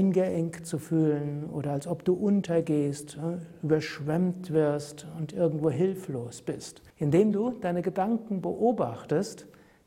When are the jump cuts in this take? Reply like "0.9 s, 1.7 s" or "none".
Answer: 6.9 s